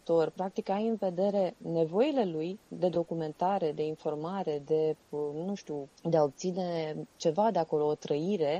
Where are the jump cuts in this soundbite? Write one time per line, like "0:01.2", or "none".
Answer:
0:06.0